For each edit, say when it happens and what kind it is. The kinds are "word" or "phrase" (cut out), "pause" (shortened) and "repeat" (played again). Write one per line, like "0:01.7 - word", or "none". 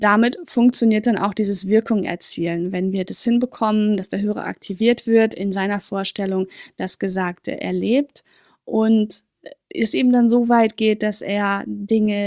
none